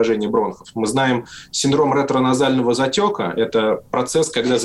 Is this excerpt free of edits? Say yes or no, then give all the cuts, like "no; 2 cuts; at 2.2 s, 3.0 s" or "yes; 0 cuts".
yes; 0 cuts